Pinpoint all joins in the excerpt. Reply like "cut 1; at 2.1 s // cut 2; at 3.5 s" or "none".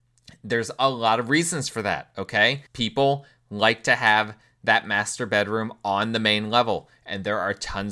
cut 1; at 2.7 s